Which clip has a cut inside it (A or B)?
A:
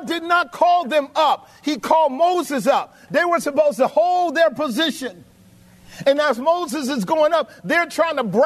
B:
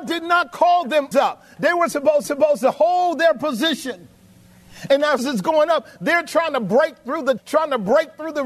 B